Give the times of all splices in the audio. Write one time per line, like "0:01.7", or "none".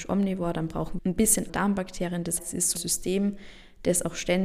0:01.0
0:01.5
0:02.4
0:02.8